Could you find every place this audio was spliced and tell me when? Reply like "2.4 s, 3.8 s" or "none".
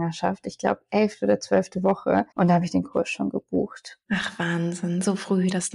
2.3 s, 4.0 s